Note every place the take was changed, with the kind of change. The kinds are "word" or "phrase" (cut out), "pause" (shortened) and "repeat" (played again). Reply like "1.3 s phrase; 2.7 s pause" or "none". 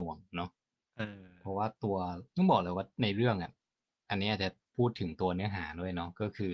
2.3 s pause; 3.7 s pause